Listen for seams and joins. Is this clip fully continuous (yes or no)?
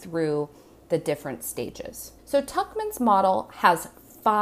no